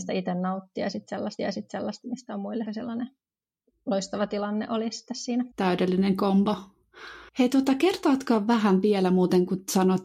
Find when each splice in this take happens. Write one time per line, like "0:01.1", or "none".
0:01.4
0:02.7
0:05.5
0:07.3